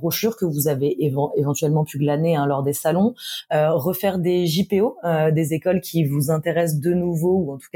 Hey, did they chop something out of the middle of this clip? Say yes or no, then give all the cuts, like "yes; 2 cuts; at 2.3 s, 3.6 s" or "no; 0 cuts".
no; 0 cuts